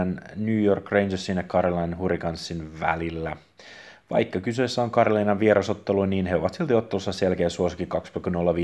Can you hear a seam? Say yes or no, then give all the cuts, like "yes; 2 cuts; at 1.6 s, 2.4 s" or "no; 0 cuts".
no; 0 cuts